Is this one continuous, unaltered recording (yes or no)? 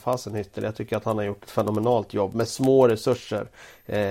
yes